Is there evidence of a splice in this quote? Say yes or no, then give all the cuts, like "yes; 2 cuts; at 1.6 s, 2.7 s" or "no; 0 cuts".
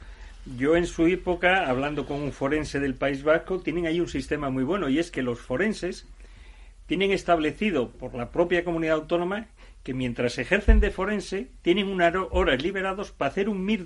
no; 0 cuts